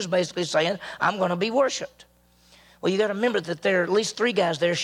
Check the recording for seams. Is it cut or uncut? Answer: uncut